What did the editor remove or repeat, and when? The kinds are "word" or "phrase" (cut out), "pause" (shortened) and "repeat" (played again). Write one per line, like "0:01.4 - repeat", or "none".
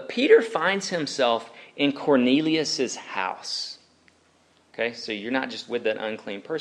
none